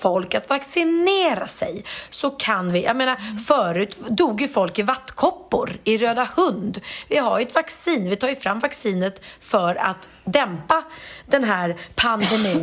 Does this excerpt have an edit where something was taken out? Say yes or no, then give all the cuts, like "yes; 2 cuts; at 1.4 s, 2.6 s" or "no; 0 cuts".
no; 0 cuts